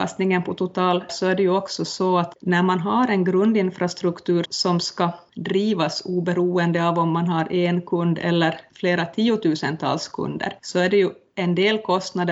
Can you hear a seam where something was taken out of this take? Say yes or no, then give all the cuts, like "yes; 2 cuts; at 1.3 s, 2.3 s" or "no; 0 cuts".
yes; 2 cuts; at 1.1 s, 4.5 s